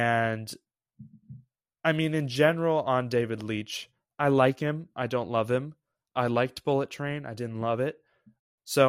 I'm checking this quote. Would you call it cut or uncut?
uncut